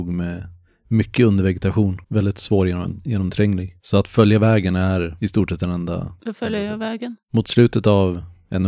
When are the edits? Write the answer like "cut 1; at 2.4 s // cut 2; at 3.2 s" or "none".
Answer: cut 1; at 2.0 s // cut 2; at 7.2 s

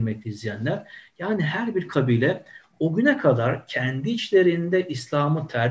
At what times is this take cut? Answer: none

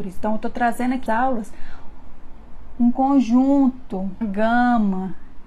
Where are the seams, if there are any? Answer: cut 1; at 1.1 s // cut 2; at 4.2 s

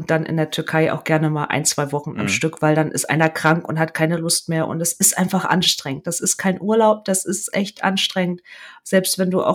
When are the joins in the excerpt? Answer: none

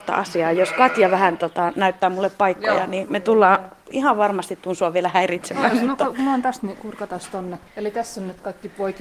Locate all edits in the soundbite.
cut 1; at 7.7 s

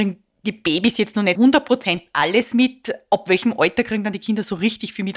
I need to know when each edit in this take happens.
cut 1; at 1.4 s

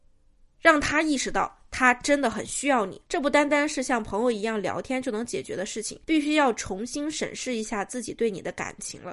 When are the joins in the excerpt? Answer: cut 1; at 6.0 s

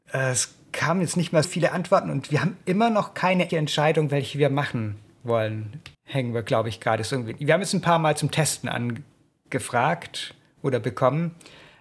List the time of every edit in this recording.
cut 1; at 1.4 s // cut 2; at 3.5 s // cut 3; at 5.9 s

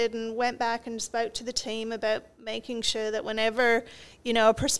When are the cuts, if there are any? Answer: none

